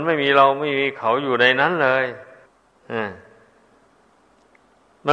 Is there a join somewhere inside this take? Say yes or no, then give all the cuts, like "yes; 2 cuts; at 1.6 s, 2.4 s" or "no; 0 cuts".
yes; 1 cut; at 2.5 s